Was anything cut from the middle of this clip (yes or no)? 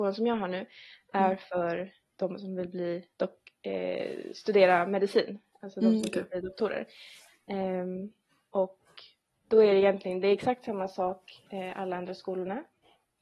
yes